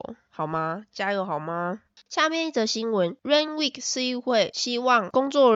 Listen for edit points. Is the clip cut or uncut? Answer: uncut